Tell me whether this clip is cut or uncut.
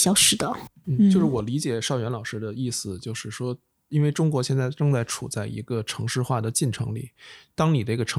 uncut